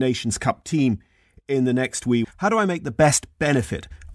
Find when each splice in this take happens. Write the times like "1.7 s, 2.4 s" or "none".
2.2 s